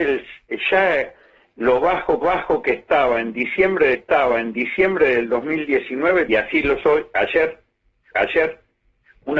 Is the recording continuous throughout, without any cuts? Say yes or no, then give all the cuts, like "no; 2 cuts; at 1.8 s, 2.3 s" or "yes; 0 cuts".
no; 5 cuts; at 2.2 s, 3.9 s, 6.3 s, 6.8 s, 8.1 s